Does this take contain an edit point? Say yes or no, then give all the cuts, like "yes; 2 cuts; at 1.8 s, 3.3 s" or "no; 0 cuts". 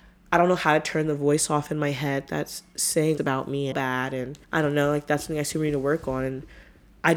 yes; 3 cuts; at 3.2 s, 3.7 s, 4.4 s